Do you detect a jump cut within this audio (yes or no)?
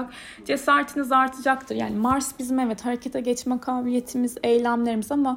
no